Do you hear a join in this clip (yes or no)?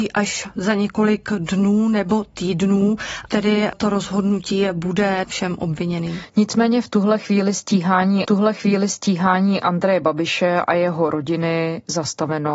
yes